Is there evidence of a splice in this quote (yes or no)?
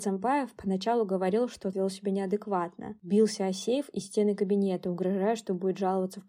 yes